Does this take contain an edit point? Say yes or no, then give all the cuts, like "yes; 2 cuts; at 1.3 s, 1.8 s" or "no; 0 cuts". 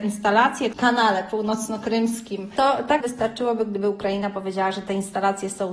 yes; 1 cut; at 3.0 s